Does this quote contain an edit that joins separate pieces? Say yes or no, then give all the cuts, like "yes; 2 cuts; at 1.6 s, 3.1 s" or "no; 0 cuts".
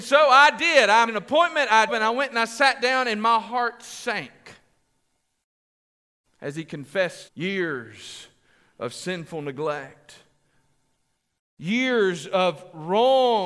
yes; 3 cuts; at 1.1 s, 1.9 s, 7.3 s